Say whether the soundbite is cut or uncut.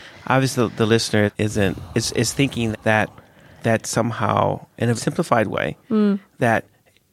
cut